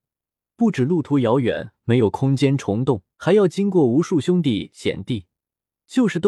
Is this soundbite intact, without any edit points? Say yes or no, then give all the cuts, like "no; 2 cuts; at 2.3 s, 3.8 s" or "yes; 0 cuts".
no; 1 cut; at 3.1 s